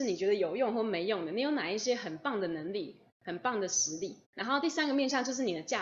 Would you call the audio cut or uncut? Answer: cut